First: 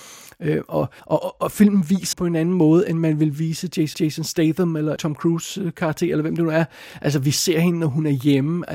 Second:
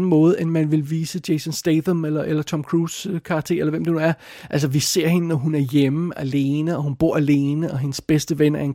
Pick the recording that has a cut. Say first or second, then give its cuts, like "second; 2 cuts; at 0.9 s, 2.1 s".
first; 4 cuts; at 1.0 s, 2.1 s, 3.9 s, 5.0 s